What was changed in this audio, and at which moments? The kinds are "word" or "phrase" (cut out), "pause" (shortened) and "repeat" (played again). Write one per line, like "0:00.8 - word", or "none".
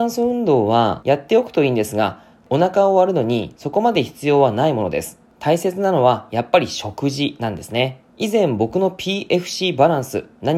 none